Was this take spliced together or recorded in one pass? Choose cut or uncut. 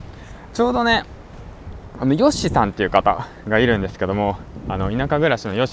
uncut